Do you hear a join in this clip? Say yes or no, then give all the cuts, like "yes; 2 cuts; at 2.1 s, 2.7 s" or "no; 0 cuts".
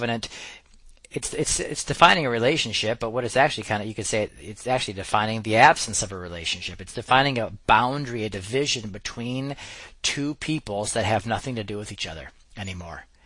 yes; 1 cut; at 1.0 s